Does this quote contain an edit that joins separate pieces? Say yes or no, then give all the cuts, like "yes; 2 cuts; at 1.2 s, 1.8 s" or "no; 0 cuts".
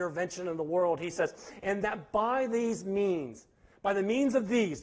no; 0 cuts